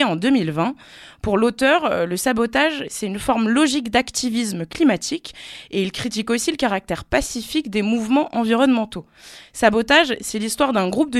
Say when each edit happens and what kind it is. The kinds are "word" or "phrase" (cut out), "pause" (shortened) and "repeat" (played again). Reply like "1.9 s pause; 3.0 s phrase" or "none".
none